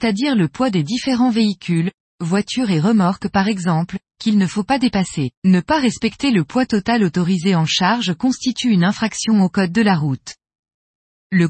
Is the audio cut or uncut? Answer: cut